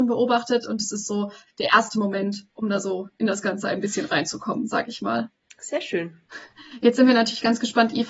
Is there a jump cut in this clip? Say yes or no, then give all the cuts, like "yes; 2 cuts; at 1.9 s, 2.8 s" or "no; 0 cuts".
no; 0 cuts